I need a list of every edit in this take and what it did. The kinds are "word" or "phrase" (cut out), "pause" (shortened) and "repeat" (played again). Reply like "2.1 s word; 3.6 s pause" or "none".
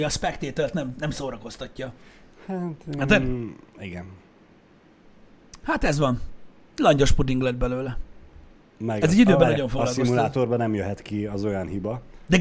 none